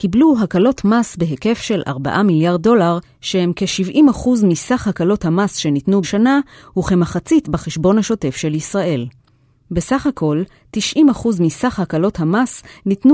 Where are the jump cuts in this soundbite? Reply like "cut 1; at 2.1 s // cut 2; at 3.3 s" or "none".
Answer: cut 1; at 6.0 s // cut 2; at 7.4 s